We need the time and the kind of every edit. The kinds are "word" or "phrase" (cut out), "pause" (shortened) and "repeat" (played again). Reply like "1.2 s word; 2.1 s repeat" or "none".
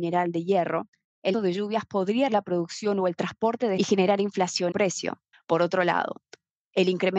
1.3 s word; 2.3 s word; 3.8 s phrase; 4.7 s phrase; 5.3 s pause